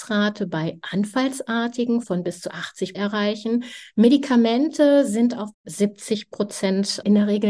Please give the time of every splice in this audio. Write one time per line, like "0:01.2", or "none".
0:02.0
0:02.9
0:05.5